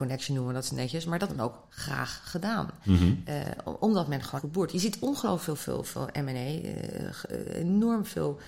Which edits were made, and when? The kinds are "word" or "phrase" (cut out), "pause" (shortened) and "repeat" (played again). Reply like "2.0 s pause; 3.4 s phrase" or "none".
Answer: 1.3 s word; 4.4 s word; 5.6 s word